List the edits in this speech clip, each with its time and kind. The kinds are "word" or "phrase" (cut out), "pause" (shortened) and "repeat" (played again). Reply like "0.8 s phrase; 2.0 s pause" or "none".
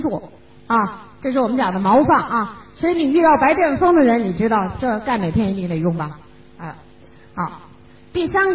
none

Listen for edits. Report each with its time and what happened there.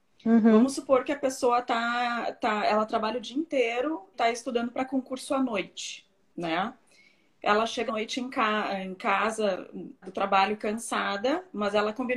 4.1 s word; 7.9 s word; 10.0 s word

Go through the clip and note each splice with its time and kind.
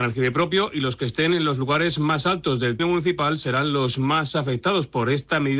2.8 s word

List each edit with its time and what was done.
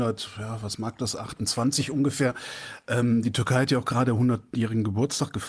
none

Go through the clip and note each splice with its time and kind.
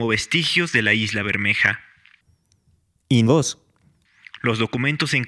3.3 s word

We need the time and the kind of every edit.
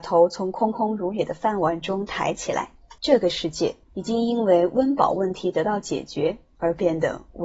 3.0 s pause; 3.8 s pause

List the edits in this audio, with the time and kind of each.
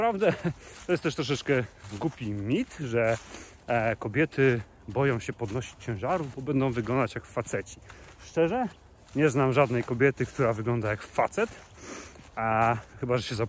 none

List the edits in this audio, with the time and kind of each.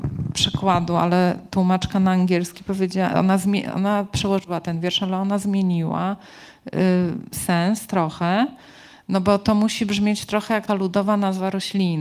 10.7 s word

